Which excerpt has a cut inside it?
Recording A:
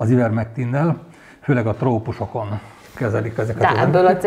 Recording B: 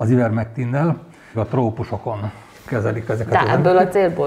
B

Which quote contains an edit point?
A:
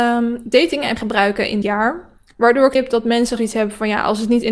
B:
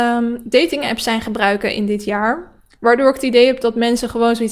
A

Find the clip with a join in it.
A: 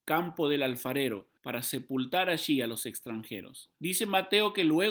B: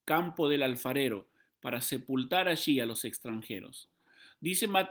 A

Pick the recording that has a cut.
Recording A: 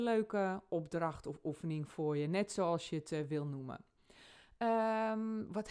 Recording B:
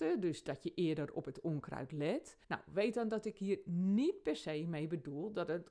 B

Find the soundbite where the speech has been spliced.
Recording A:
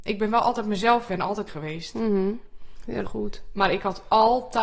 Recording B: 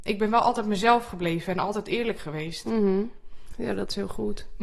A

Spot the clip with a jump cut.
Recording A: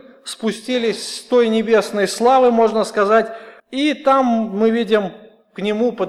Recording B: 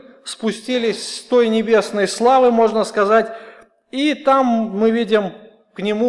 A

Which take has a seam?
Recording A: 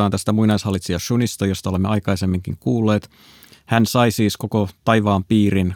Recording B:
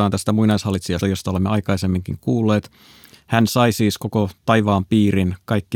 B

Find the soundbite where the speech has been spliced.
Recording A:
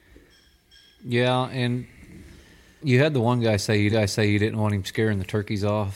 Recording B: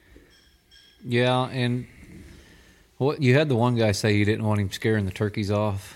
A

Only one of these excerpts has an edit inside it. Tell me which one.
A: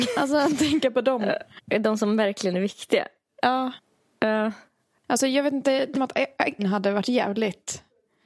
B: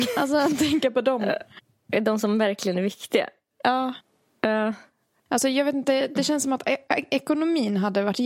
A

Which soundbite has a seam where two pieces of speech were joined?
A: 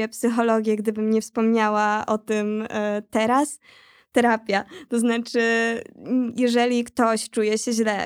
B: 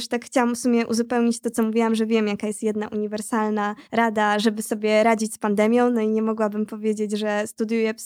B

